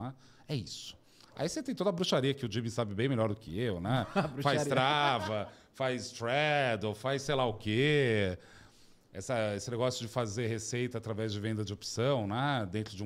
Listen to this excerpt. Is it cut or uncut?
uncut